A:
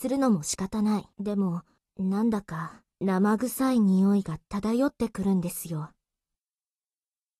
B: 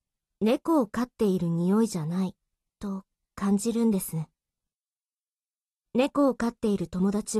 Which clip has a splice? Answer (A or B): A